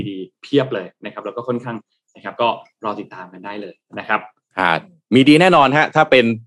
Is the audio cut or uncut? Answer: cut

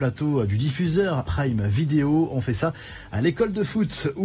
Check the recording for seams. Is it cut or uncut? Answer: cut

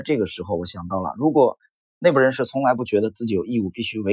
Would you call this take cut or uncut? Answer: uncut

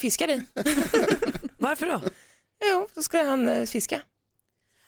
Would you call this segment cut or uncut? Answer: uncut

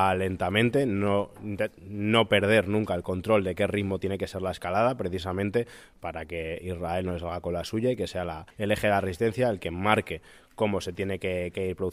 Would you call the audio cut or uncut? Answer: cut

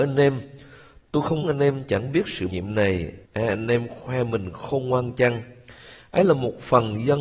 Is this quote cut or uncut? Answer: cut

